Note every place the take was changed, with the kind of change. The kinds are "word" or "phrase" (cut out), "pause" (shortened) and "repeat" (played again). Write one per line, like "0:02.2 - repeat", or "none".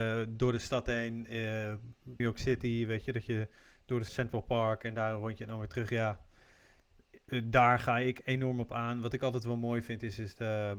0:02.2 - word
0:04.1 - phrase